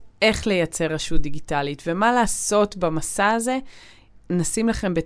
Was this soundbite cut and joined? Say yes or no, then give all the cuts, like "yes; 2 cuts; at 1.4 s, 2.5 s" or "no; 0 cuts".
no; 0 cuts